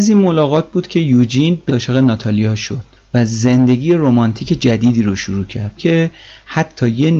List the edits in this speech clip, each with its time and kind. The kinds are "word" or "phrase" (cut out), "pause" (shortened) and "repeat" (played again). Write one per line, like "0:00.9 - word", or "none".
0:01.7 - word
0:02.9 - pause
0:05.8 - phrase

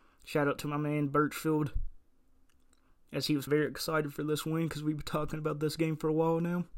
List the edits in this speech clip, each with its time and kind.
0:03.5 - word

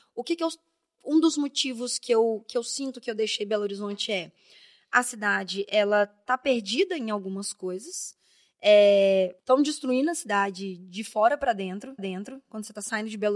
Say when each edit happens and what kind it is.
0:09.4 - pause
0:12.0 - repeat

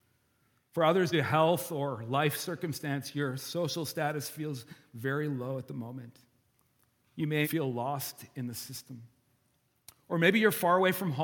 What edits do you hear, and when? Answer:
0:01.1 - word
0:07.4 - word

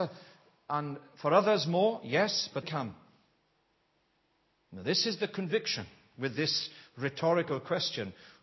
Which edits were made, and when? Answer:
0:02.6 - word

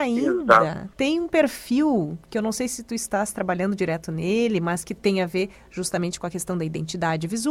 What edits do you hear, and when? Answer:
0:00.9 - pause

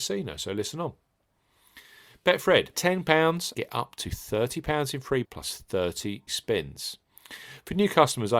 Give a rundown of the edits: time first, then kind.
0:02.7 - word
0:03.5 - word
0:05.2 - word
0:06.3 - word

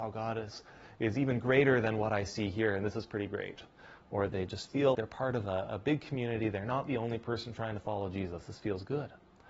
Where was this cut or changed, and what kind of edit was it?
0:04.3 - word
0:04.9 - word

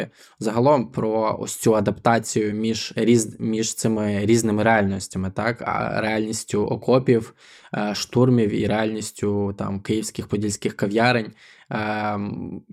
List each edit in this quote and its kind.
none

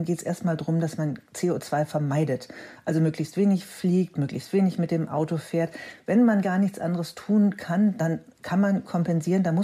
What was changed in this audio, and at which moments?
none

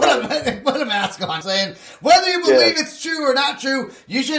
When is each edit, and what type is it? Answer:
0:01.4 - phrase

